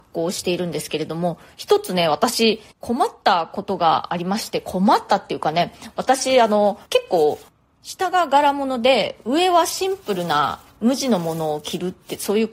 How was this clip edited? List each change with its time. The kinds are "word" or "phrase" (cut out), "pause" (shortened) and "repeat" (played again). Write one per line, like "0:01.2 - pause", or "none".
0:06.9 - pause